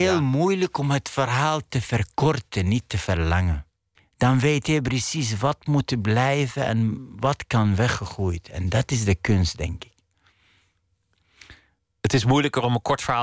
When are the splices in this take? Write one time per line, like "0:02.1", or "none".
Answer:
0:03.9